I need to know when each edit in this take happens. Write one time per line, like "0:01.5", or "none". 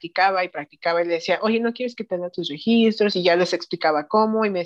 none